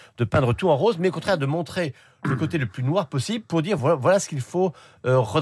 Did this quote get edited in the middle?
no; 0 cuts

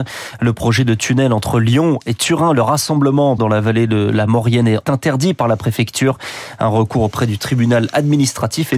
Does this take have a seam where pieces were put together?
yes; 2 cuts; at 3.4 s, 4.8 s

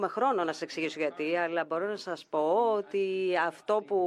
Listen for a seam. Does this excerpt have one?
no; 0 cuts

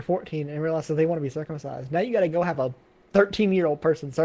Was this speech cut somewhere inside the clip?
no; 0 cuts

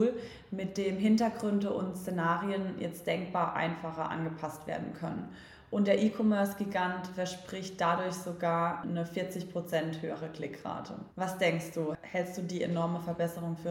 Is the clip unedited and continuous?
no; 1 cut; at 11.1 s

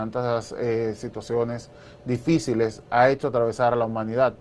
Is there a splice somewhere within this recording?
no; 0 cuts

